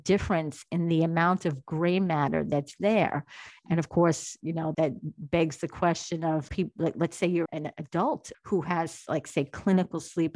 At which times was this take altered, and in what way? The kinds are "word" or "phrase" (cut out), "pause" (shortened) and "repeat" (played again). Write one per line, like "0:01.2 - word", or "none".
0:04.7 - word
0:06.5 - word
0:07.5 - word
0:08.3 - word